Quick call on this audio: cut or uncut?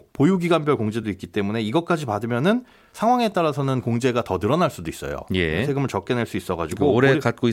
uncut